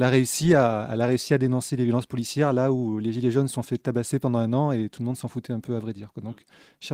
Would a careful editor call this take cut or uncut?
uncut